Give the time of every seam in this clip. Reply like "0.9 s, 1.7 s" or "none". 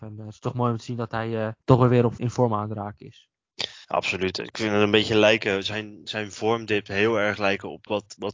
1.6 s, 2.2 s, 3.8 s